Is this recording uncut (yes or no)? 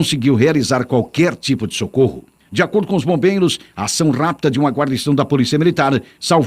yes